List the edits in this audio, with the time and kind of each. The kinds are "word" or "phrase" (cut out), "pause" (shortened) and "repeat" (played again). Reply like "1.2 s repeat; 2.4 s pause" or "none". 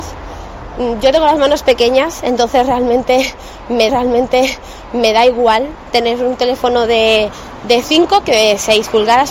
3.9 s repeat